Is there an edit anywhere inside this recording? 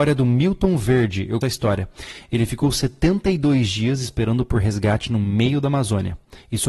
yes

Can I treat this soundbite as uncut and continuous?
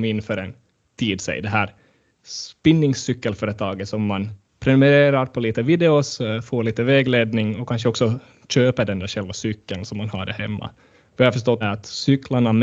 no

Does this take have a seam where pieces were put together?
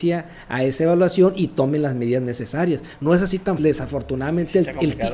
yes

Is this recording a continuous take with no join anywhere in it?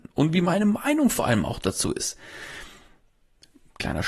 yes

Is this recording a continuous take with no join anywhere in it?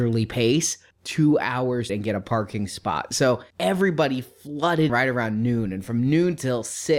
no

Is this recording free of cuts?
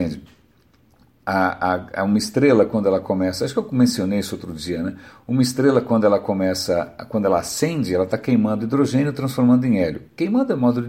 yes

